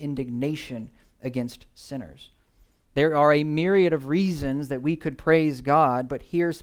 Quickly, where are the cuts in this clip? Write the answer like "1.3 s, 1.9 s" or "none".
none